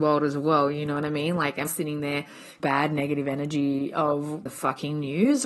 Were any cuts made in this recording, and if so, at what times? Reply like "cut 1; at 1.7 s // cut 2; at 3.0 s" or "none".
cut 1; at 1.7 s // cut 2; at 2.6 s // cut 3; at 4.5 s